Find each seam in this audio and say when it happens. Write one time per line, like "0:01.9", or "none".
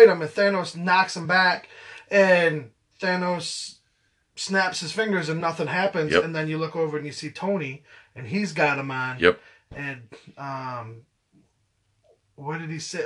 none